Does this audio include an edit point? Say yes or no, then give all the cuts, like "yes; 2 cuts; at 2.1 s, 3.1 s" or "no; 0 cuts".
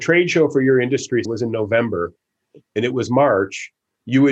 yes; 1 cut; at 1.2 s